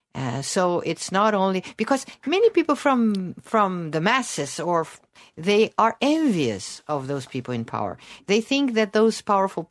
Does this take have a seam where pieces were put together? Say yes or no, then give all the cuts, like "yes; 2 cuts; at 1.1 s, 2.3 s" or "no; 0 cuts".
no; 0 cuts